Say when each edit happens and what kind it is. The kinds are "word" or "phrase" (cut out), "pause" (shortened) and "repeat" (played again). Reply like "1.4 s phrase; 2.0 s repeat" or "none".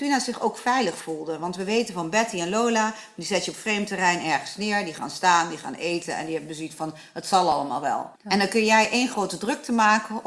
8.2 s pause

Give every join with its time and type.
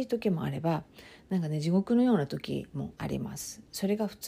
3.0 s pause

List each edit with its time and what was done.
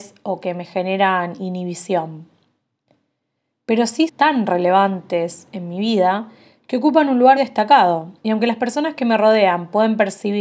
4.1 s word; 7.4 s word; 8.2 s pause

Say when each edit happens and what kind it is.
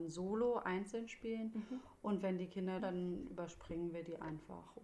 2.8 s phrase

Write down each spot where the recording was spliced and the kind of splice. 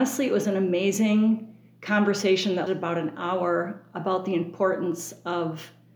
2.7 s word

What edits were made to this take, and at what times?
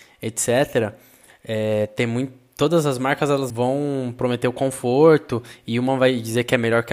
3.5 s word

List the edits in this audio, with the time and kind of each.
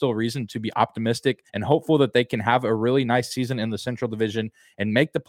1.5 s pause

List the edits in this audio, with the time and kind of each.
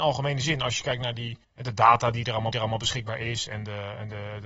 1.4 s pause; 2.5 s repeat

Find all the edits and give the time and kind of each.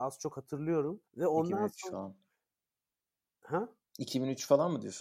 1.1 s pause; 3.8 s pause

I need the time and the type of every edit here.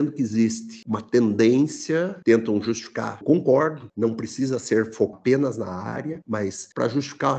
2.2 s word; 3.2 s phrase; 5.1 s word

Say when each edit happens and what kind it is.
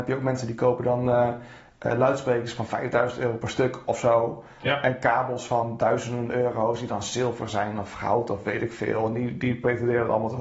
none

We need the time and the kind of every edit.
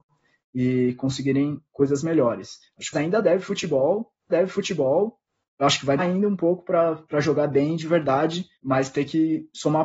2.9 s word; 4.3 s repeat; 6.0 s word; 8.5 s pause

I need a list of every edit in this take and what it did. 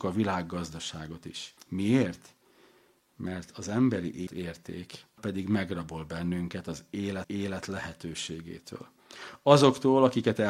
1.6 s pause; 4.3 s word; 5.2 s word; 7.2 s repeat

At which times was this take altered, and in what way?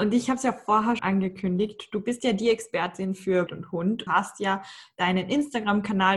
1.0 s word; 3.5 s word; 4.1 s phrase

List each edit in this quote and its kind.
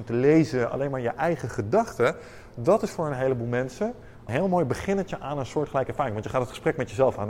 4.3 s phrase

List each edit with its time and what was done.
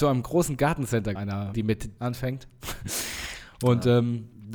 1.2 s word; 1.5 s word; 2.0 s word

